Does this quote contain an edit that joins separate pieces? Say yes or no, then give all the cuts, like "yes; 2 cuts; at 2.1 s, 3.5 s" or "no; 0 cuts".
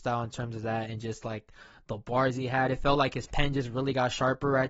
no; 0 cuts